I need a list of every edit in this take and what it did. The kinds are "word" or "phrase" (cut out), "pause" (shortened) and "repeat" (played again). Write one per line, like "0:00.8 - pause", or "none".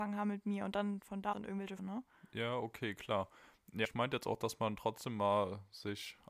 0:01.3 - word
0:01.8 - word
0:03.8 - word